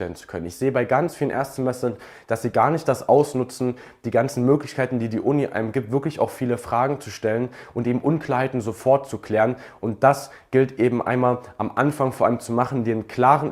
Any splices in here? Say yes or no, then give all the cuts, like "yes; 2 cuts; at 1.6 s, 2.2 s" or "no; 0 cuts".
no; 0 cuts